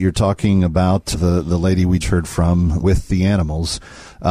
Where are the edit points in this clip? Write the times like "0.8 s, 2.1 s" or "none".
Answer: 1.1 s, 2.0 s, 2.8 s